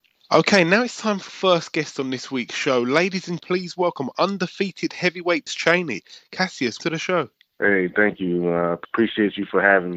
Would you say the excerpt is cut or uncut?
cut